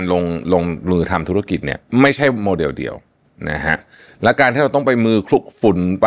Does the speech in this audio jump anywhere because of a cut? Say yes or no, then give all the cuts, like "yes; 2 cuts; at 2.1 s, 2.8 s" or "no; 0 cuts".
no; 0 cuts